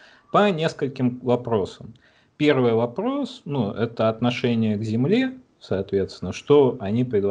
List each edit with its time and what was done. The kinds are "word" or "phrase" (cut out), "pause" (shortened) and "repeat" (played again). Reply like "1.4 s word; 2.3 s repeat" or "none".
none